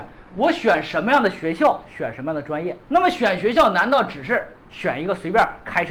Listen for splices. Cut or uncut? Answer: cut